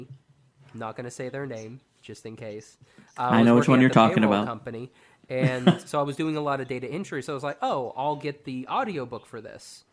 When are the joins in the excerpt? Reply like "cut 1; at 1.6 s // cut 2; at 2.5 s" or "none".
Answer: none